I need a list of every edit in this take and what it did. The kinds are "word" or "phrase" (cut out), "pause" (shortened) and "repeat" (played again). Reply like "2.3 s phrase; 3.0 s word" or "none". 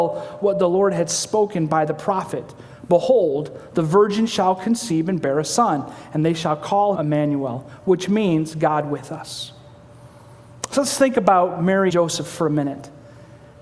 7.0 s phrase; 11.9 s word